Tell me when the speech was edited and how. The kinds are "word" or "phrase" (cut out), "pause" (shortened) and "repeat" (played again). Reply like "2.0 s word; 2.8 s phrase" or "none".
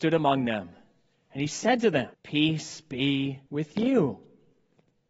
2.1 s pause; 3.5 s pause